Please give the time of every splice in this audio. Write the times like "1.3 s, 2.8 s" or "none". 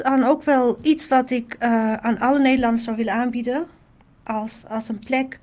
none